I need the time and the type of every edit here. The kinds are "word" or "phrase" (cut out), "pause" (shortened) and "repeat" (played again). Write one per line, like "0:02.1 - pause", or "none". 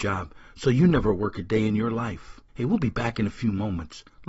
0:02.5 - pause